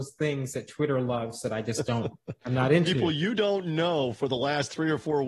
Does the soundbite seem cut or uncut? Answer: uncut